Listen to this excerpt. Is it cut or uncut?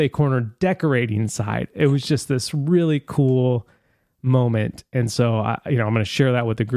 uncut